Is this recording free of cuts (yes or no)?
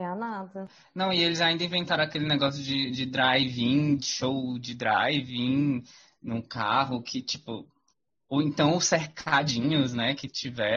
yes